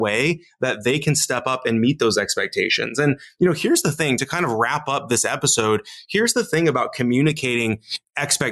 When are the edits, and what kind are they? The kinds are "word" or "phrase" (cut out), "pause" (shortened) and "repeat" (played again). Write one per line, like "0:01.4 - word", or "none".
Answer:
none